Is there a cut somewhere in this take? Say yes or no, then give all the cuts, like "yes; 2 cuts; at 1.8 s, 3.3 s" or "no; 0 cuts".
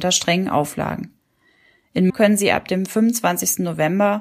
yes; 1 cut; at 2.1 s